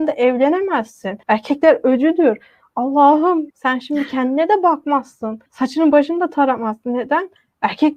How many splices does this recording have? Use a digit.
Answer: 3